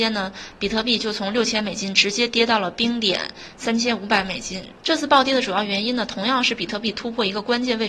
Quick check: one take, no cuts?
no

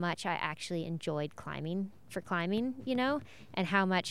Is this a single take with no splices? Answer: yes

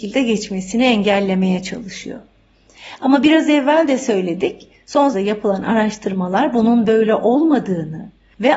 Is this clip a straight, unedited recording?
no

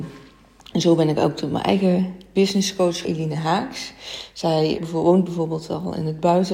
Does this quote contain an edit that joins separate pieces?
yes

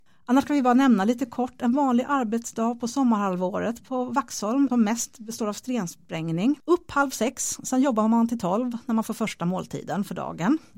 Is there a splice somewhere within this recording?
no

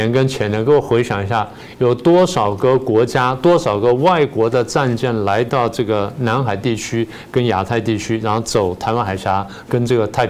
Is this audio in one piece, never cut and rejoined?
yes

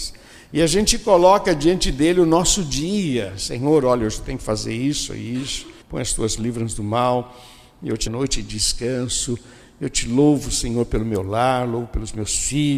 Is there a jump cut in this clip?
yes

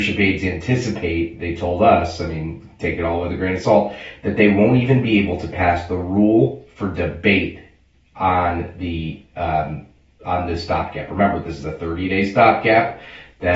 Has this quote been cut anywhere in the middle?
no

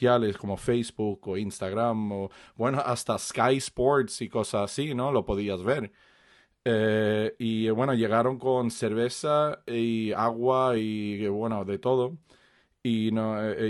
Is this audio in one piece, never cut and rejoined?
yes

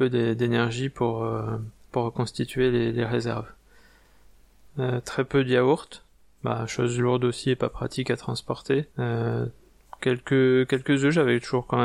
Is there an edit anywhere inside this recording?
yes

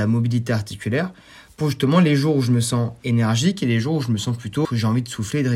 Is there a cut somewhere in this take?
yes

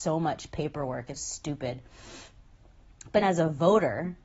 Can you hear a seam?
yes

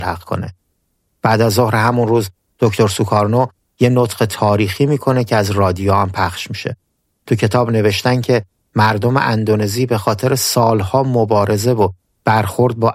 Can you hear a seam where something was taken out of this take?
no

